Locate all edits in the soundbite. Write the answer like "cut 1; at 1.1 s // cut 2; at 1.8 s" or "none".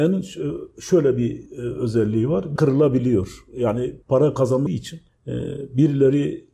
cut 1; at 1.5 s // cut 2; at 2.6 s // cut 3; at 4.0 s // cut 4; at 4.7 s